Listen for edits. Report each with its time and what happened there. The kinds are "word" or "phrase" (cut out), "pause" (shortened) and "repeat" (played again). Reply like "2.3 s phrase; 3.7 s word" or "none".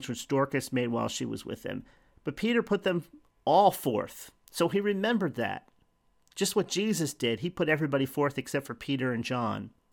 none